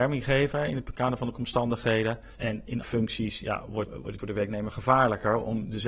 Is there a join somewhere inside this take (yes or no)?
yes